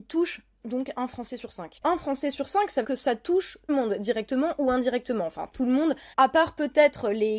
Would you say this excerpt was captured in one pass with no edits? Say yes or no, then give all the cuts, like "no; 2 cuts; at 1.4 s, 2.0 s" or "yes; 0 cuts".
no; 4 cuts; at 1.8 s, 2.8 s, 3.7 s, 6.1 s